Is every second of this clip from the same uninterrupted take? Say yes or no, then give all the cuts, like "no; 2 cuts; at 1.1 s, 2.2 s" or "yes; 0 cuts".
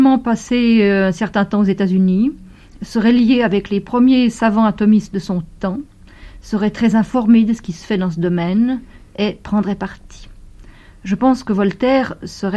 yes; 0 cuts